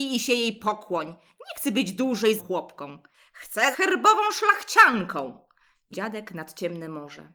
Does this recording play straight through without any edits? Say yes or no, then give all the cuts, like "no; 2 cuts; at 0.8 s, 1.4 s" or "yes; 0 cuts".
no; 3 cuts; at 2.4 s, 3.7 s, 5.9 s